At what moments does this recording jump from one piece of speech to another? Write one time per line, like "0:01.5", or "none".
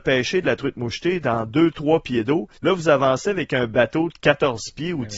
0:02.6